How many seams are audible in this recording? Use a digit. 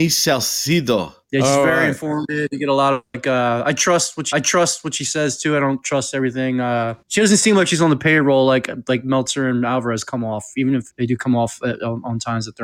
4